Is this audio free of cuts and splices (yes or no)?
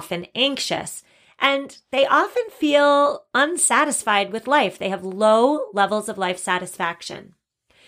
yes